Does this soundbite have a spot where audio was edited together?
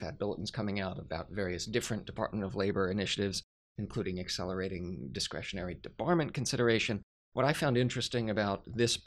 no; 0 cuts

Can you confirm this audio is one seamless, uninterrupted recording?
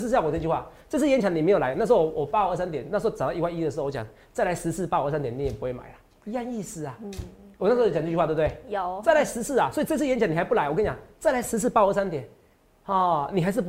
yes; 0 cuts

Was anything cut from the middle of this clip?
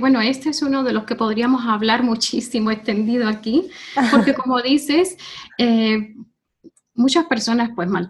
no; 0 cuts

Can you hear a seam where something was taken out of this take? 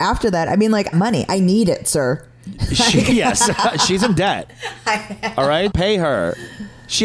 yes; 2 cuts; at 0.9 s, 5.7 s

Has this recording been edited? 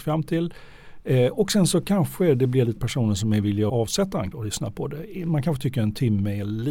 yes; 3 cuts; at 2.8 s, 3.7 s, 4.3 s

